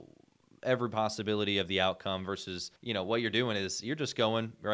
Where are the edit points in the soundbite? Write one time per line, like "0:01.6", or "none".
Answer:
0:02.8